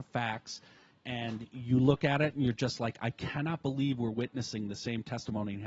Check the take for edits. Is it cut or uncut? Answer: uncut